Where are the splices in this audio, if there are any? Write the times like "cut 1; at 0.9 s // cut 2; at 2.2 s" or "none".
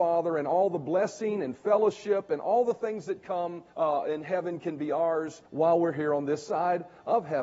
cut 1; at 3.7 s // cut 2; at 5.5 s